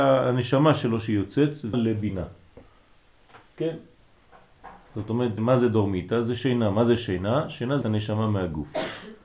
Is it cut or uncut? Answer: cut